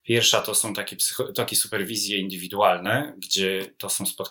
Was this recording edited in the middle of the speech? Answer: no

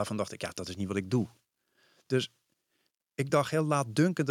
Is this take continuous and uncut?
yes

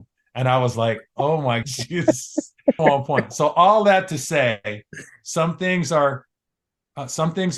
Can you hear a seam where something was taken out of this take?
yes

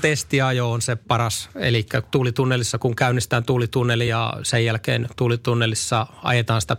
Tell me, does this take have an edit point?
no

